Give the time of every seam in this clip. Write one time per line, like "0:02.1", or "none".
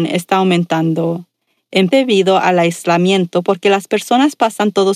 0:01.9